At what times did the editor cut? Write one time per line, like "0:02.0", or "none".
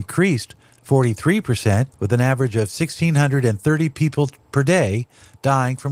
0:01.9